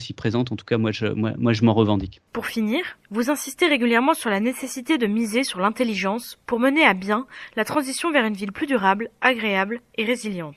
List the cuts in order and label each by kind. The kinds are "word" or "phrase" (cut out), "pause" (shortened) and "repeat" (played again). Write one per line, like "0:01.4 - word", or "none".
0:02.3 - pause
0:03.0 - pause